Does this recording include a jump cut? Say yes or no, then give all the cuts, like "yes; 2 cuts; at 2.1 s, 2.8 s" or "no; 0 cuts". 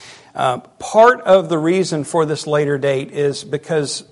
no; 0 cuts